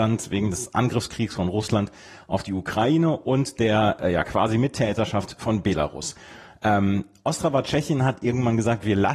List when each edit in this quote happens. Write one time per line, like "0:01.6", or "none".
none